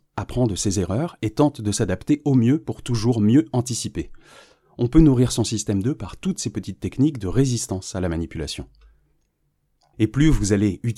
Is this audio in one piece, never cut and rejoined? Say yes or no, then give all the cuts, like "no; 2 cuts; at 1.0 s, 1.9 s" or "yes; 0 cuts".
yes; 0 cuts